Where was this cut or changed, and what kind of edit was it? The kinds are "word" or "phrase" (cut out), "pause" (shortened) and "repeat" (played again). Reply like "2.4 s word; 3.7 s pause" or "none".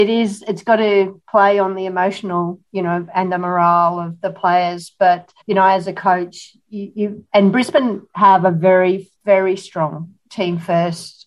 2.7 s word; 5.4 s pause; 9.2 s pause